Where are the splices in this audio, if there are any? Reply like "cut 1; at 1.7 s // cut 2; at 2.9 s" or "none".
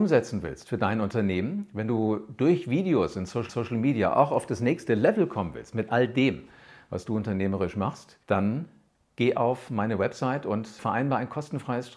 cut 1; at 3.5 s // cut 2; at 8.2 s // cut 3; at 10.8 s